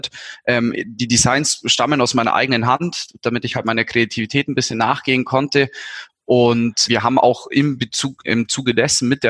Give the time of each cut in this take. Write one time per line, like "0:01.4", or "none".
0:06.9